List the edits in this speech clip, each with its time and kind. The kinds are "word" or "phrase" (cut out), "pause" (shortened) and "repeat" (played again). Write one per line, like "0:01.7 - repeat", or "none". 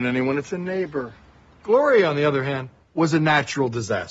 none